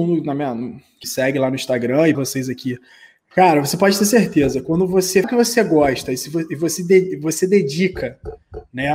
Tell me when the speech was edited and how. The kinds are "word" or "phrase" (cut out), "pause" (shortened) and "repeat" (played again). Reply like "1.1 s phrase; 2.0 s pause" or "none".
1.0 s word; 2.1 s word; 5.2 s word; 6.8 s word